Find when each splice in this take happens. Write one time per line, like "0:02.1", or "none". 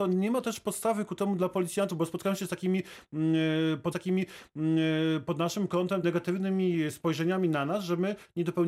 0:03.9
0:06.0